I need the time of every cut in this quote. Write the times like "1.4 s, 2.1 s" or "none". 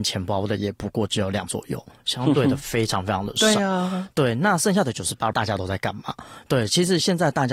1.5 s, 5.3 s